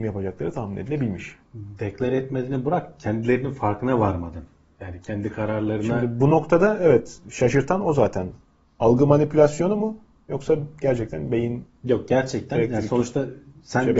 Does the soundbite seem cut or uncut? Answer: uncut